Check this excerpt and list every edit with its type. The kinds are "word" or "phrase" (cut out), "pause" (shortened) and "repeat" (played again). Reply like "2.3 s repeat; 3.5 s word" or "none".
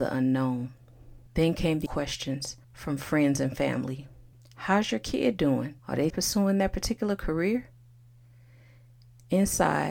1.3 s pause; 1.9 s word; 2.6 s pause; 4.3 s pause; 5.8 s pause; 6.1 s word